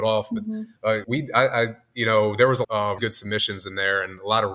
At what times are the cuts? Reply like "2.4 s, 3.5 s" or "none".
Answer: 1.0 s, 2.6 s, 3.0 s